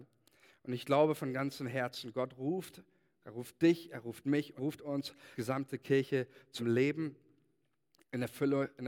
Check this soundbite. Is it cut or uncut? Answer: cut